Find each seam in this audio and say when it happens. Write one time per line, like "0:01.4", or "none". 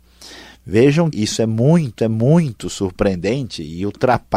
0:01.1
0:02.0